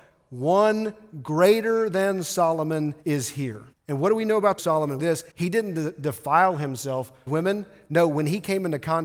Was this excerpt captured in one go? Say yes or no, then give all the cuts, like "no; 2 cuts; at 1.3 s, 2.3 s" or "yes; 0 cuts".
no; 6 cuts; at 3.0 s, 3.7 s, 4.6 s, 5.0 s, 5.3 s, 7.3 s